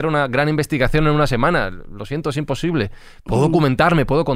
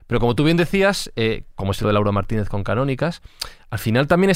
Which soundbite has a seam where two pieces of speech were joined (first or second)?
second